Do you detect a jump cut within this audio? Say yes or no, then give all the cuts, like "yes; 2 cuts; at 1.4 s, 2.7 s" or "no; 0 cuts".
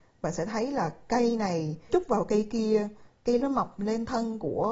yes; 2 cuts; at 1.9 s, 3.4 s